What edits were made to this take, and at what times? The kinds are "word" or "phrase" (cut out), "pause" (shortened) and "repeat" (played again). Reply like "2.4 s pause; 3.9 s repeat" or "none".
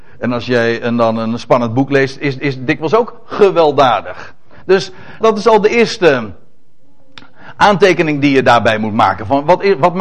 2.4 s repeat; 5.2 s word